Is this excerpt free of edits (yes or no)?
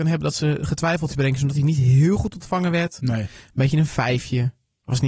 no